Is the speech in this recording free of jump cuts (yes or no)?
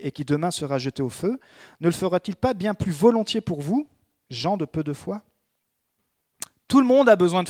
yes